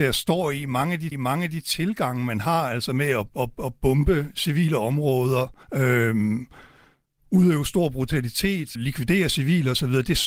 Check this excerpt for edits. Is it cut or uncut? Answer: cut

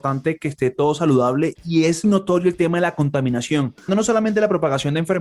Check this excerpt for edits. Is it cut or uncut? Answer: cut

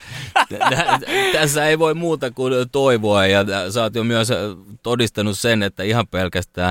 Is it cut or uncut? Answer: uncut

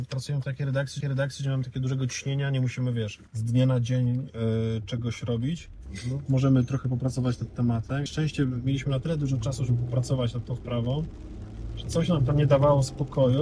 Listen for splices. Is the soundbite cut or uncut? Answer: cut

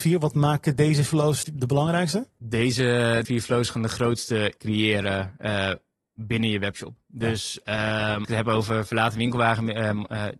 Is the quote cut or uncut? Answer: cut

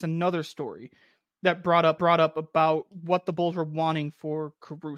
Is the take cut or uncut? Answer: cut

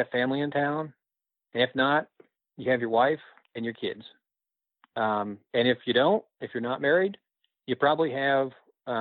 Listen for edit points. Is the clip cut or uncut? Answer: uncut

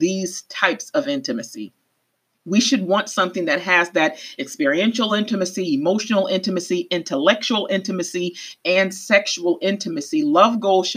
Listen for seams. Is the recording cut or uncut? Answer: uncut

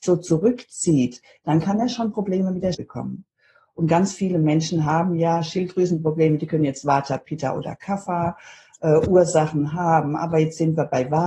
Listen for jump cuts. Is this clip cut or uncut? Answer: cut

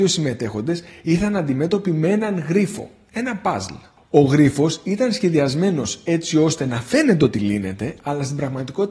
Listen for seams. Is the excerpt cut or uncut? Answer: uncut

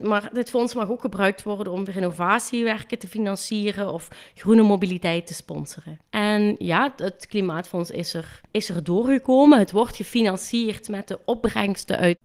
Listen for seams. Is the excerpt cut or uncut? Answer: cut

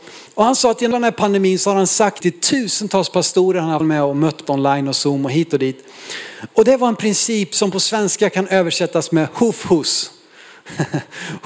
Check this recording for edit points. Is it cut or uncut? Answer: cut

